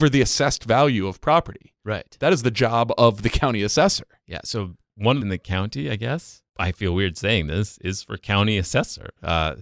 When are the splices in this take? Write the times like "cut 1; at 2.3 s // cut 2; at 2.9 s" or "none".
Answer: cut 1; at 5.2 s // cut 2; at 6.5 s